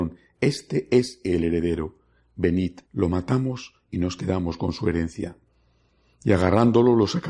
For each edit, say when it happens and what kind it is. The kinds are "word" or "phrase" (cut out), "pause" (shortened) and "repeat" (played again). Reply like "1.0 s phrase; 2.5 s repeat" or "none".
2.9 s pause